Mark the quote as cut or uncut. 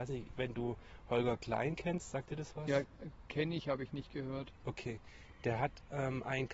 uncut